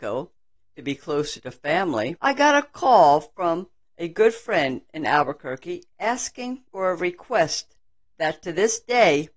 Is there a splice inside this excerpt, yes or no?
yes